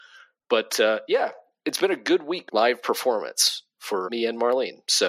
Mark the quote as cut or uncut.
cut